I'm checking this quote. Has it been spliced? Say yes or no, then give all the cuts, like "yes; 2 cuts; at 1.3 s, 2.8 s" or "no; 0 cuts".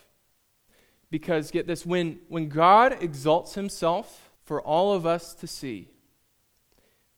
yes; 1 cut; at 4.4 s